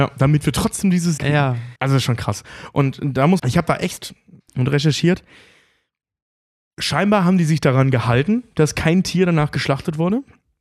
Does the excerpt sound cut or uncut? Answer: cut